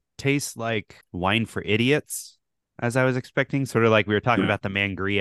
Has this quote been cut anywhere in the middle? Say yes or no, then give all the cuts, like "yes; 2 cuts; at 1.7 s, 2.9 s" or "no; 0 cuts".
no; 0 cuts